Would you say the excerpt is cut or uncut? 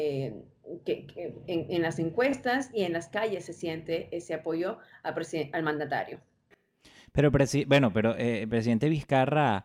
uncut